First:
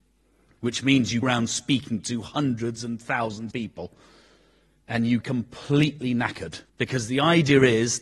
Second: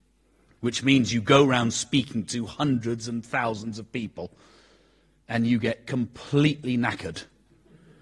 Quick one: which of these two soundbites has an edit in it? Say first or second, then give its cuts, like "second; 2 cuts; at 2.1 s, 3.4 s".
first; 4 cuts; at 1.2 s, 3.5 s, 5.2 s, 6.7 s